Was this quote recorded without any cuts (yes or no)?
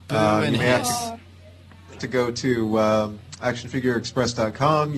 no